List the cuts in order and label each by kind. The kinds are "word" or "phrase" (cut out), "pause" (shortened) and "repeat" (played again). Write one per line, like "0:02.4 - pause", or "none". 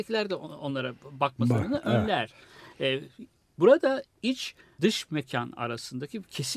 0:04.8 - word